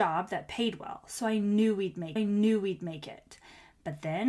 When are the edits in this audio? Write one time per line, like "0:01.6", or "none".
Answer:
0:02.2